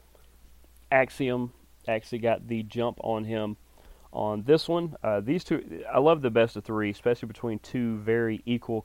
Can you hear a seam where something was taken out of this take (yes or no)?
no